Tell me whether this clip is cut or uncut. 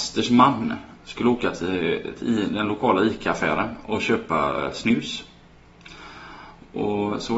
uncut